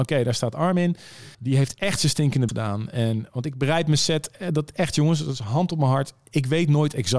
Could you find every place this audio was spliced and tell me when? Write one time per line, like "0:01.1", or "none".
0:01.3
0:02.5